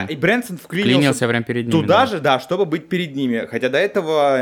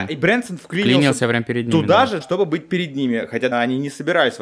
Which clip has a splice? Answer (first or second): second